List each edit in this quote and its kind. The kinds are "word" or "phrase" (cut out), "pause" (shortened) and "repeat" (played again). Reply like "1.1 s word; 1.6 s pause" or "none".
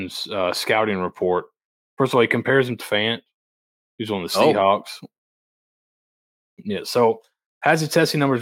2.8 s word